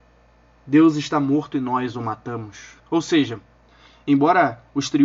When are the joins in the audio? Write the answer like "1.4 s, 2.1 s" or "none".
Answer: 2.8 s

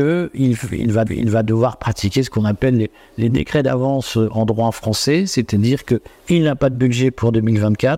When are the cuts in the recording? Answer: 1.1 s

